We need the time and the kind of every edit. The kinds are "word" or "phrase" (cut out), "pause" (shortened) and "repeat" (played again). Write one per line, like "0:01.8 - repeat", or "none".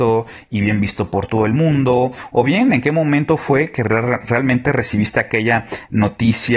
none